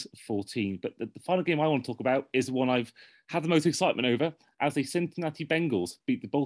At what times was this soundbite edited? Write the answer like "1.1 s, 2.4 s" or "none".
none